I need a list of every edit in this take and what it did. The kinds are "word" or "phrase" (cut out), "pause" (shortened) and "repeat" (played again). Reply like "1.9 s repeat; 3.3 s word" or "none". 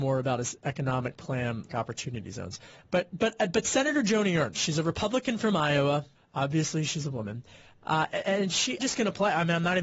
1.7 s phrase; 6.1 s pause; 8.1 s word; 8.8 s word